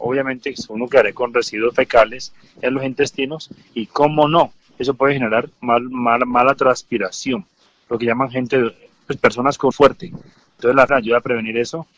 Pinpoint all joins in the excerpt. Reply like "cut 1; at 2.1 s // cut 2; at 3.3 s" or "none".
cut 1; at 9.7 s // cut 2; at 10.9 s

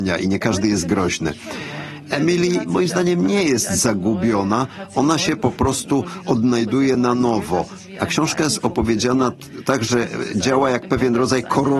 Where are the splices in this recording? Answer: none

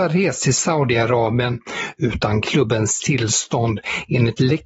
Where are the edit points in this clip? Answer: none

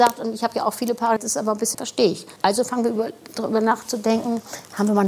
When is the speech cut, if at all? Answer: cut 1; at 1.2 s // cut 2; at 1.7 s // cut 3; at 2.4 s

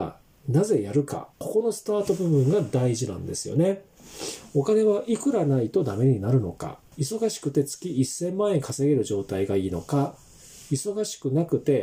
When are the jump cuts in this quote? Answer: cut 1; at 1.3 s // cut 2; at 6.9 s

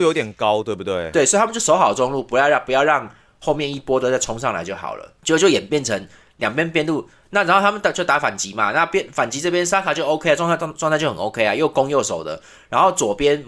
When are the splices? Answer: none

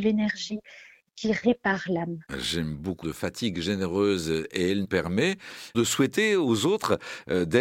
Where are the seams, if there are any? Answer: cut 1; at 2.2 s // cut 2; at 3.0 s // cut 3; at 4.8 s

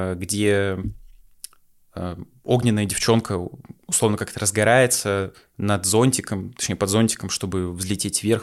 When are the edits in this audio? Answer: none

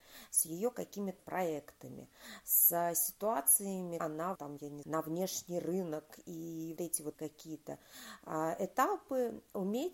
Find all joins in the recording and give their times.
cut 1; at 1.2 s // cut 2; at 4.0 s // cut 3; at 4.3 s // cut 4; at 4.8 s // cut 5; at 6.8 s // cut 6; at 7.1 s

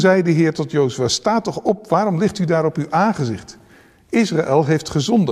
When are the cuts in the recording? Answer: none

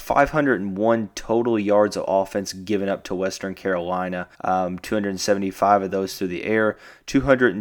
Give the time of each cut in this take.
cut 1; at 4.3 s

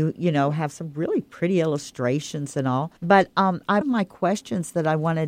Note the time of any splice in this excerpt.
cut 1; at 3.0 s // cut 2; at 3.8 s

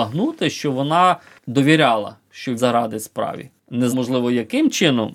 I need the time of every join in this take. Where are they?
cut 1; at 2.6 s // cut 2; at 3.9 s

